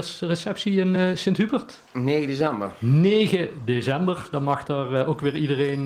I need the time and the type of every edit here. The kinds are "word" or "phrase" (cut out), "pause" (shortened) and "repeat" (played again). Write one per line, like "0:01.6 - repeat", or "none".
none